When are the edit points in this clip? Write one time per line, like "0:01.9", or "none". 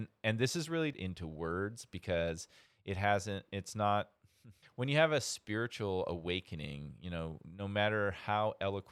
0:00.9
0:04.6